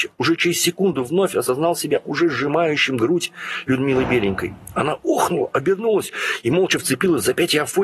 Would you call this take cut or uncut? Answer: uncut